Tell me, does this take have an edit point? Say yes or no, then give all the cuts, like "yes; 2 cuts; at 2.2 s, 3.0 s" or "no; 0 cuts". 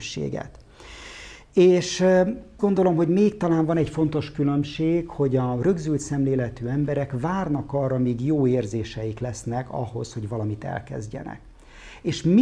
yes; 1 cut; at 2.6 s